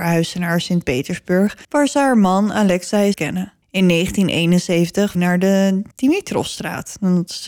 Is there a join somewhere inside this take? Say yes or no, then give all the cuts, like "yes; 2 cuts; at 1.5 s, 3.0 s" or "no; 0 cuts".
yes; 5 cuts; at 1.6 s, 3.1 s, 3.6 s, 5.1 s, 5.9 s